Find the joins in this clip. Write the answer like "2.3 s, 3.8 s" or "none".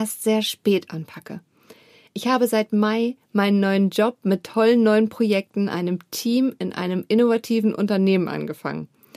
none